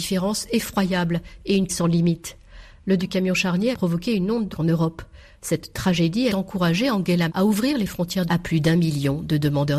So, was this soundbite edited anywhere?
yes; 7 cuts; at 1.7 s, 3.0 s, 3.7 s, 4.5 s, 6.3 s, 7.3 s, 8.3 s

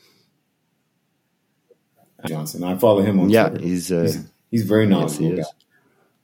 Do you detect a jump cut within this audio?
yes; 1 cut; at 2.3 s

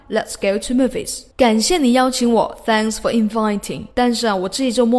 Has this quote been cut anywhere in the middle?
yes; 2 cuts; at 1.3 s, 3.9 s

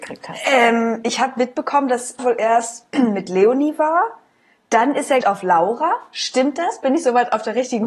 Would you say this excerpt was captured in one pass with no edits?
no; 2 cuts; at 2.2 s, 5.2 s

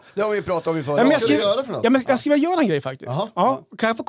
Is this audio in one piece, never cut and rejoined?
yes; 0 cuts

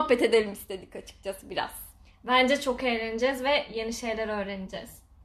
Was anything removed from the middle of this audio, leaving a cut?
no; 0 cuts

